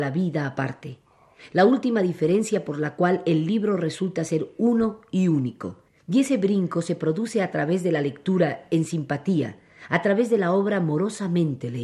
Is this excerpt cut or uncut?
cut